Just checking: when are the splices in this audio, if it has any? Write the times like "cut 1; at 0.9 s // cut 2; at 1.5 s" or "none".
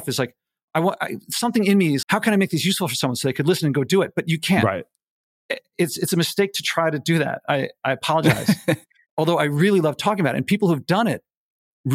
cut 1; at 2.0 s